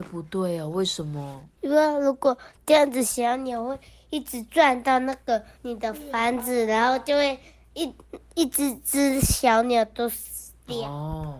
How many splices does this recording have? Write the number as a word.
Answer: two